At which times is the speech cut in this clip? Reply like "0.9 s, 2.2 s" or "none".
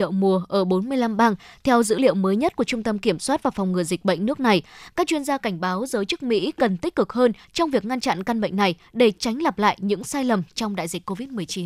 none